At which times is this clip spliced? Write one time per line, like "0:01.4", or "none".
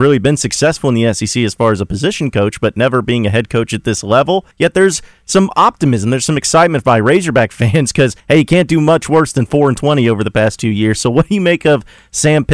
0:04.5
0:08.2